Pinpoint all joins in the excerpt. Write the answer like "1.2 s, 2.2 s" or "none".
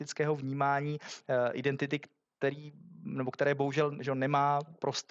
none